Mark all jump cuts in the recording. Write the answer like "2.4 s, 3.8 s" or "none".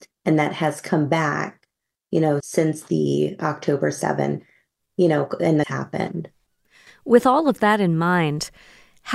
2.4 s, 5.6 s